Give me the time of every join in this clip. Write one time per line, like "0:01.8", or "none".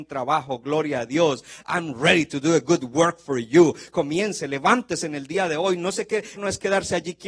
0:06.4